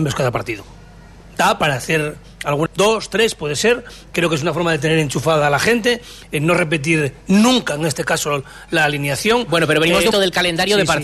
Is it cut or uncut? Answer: cut